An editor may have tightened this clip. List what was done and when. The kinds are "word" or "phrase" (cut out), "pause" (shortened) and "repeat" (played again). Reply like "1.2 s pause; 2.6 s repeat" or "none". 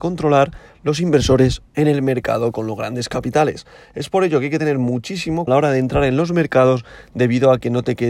1.7 s phrase; 5.5 s word